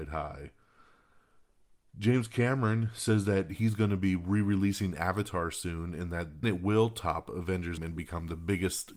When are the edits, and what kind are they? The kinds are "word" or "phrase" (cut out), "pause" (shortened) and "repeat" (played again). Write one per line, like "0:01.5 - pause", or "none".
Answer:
0:06.4 - word
0:07.8 - word